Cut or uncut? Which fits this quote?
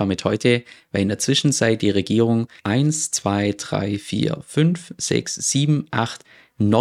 cut